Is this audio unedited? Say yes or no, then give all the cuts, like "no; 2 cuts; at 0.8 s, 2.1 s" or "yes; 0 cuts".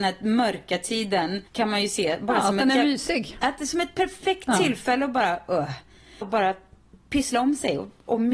no; 2 cuts; at 1.5 s, 6.2 s